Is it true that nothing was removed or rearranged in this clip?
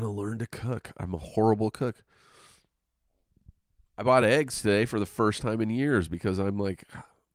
yes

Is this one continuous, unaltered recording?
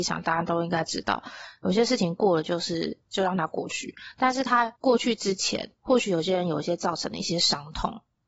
no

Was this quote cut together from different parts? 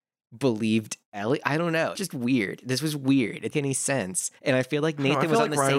yes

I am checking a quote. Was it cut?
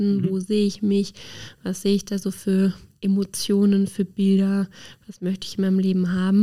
no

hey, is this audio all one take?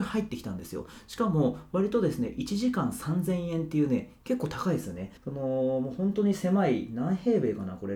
no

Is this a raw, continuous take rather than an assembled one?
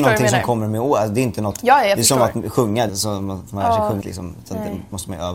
no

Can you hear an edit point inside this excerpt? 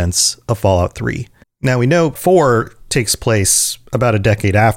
yes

